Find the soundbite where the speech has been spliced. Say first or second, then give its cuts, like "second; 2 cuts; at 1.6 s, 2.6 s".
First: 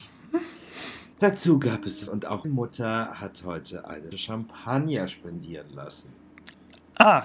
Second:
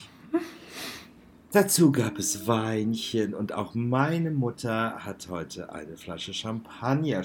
first; 4 cuts; at 1.1 s, 2.1 s, 2.4 s, 4.1 s